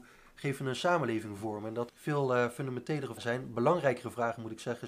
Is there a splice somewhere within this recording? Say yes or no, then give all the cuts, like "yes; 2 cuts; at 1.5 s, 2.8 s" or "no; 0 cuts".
yes; 2 cuts; at 1.9 s, 3.2 s